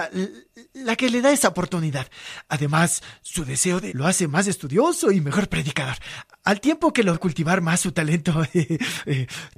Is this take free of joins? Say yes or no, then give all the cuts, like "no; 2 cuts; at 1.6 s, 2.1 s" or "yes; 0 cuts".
no; 2 cuts; at 3.9 s, 7.1 s